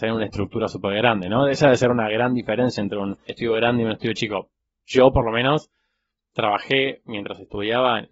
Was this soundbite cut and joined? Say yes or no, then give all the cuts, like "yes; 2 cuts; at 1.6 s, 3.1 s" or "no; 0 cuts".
no; 0 cuts